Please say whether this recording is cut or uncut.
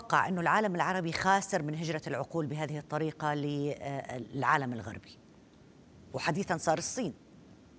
uncut